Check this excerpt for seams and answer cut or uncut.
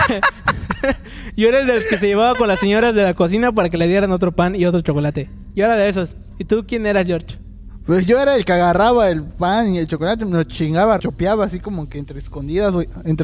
cut